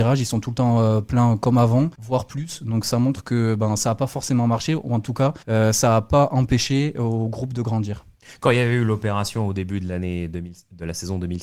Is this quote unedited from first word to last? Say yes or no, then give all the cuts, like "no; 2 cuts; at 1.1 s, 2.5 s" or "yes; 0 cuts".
no; 2 cuts; at 1.9 s, 5.4 s